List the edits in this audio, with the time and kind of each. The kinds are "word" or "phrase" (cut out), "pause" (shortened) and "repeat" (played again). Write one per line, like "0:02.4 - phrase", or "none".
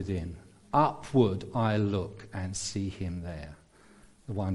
none